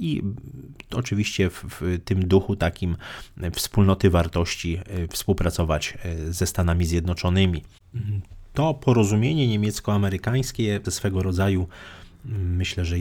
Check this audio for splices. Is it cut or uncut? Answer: cut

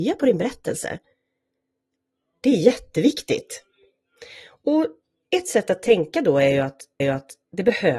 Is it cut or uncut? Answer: cut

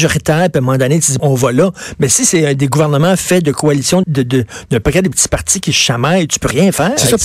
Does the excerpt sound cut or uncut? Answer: cut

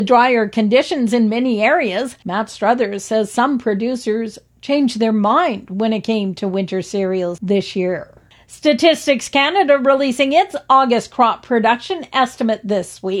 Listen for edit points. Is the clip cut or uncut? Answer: uncut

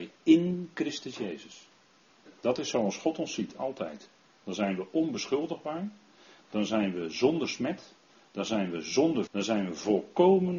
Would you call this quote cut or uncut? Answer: cut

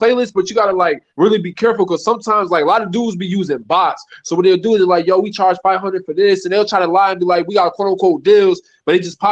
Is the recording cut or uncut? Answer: cut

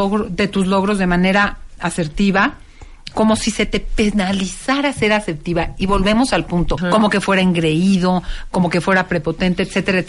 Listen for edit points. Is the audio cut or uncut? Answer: cut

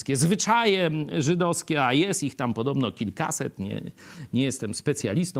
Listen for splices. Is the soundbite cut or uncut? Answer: uncut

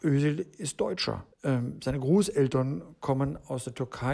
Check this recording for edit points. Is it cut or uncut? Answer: cut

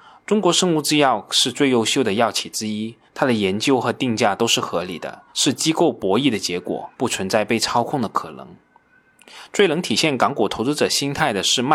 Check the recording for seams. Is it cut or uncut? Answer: cut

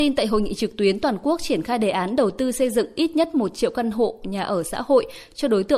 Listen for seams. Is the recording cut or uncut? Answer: uncut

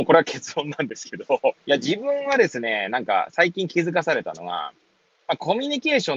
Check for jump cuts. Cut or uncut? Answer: cut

